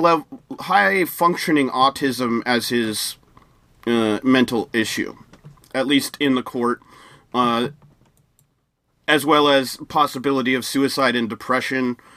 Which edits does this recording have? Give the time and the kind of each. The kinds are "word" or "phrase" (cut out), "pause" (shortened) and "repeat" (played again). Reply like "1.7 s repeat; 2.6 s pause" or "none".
none